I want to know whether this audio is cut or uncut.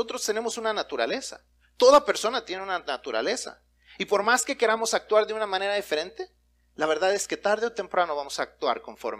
uncut